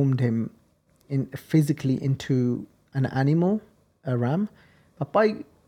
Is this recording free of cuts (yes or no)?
yes